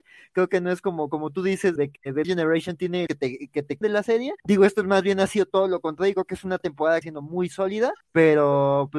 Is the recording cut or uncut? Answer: cut